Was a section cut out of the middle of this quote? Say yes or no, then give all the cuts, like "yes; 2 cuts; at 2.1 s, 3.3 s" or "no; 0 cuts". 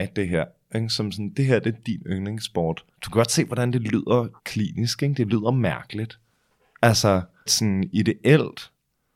yes; 3 cuts; at 2.9 s, 4.4 s, 7.5 s